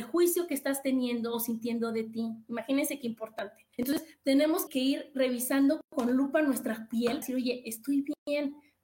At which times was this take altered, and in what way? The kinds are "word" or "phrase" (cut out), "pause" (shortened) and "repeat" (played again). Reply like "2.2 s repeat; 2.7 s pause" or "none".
3.7 s pause; 4.7 s word; 7.2 s word